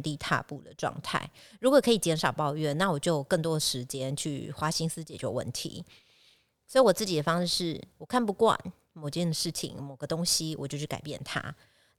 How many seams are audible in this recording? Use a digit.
0